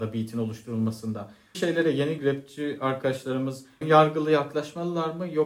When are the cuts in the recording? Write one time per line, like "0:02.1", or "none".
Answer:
0:01.5
0:02.2
0:03.8